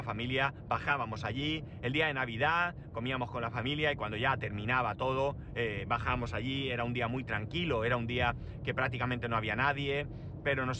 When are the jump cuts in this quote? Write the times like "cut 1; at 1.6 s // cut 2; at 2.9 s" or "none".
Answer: none